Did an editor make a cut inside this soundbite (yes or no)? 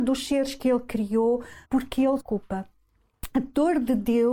yes